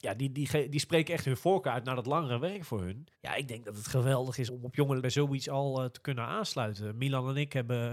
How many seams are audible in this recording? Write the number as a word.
three